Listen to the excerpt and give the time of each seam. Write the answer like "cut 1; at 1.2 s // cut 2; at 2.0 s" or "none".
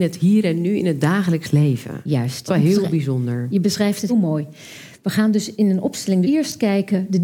cut 1; at 2.5 s // cut 2; at 4.1 s // cut 3; at 6.2 s